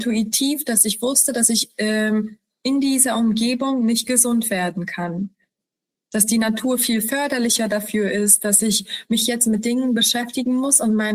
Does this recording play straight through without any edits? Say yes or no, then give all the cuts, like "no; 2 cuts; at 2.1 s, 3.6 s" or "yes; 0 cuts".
yes; 0 cuts